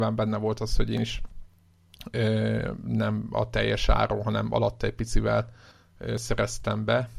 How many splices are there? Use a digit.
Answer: 1